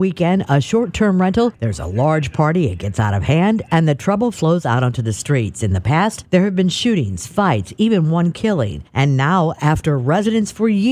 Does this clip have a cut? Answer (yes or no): no